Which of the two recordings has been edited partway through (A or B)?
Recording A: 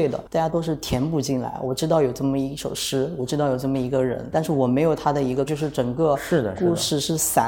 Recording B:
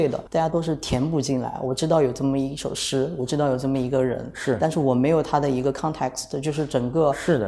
A